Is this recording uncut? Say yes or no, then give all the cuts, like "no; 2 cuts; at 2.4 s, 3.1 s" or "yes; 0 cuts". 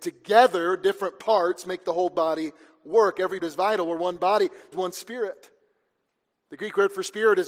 no; 2 cuts; at 3.4 s, 4.7 s